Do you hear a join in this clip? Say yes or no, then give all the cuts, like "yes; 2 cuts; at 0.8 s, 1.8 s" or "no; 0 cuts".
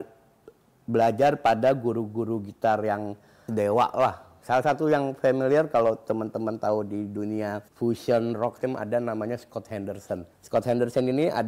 yes; 4 cuts; at 3.5 s, 7.7 s, 8.6 s, 10.3 s